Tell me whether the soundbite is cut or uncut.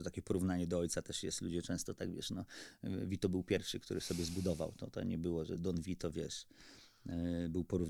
uncut